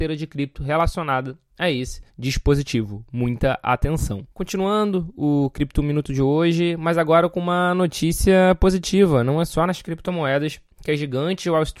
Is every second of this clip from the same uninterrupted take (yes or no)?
no